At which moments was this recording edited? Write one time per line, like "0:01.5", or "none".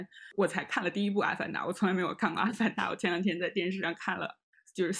none